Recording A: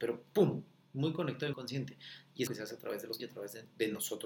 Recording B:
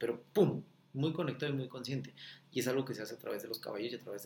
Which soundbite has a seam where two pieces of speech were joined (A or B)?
A